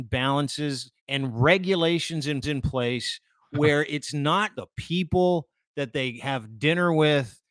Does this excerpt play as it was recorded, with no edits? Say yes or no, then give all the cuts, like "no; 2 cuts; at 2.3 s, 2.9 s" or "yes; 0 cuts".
no; 3 cuts; at 1.0 s, 2.4 s, 4.5 s